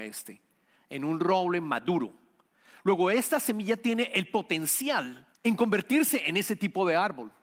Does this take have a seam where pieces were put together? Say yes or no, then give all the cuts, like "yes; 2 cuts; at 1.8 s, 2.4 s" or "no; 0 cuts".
yes; 1 cut; at 5.3 s